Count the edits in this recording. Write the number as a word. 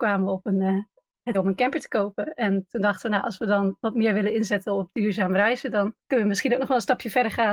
two